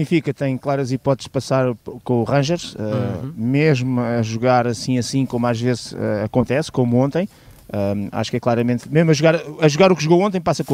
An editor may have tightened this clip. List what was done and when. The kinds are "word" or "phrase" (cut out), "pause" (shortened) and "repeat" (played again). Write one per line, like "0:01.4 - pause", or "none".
none